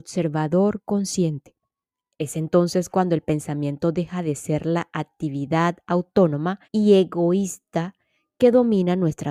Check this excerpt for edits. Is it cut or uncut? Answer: cut